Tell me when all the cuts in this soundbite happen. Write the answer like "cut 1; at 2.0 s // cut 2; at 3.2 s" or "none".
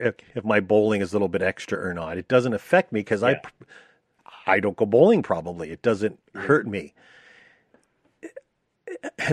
cut 1; at 6.3 s